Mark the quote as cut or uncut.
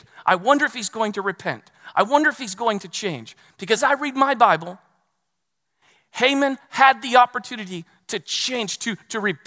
cut